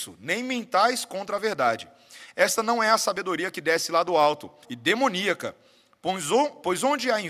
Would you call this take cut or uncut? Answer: cut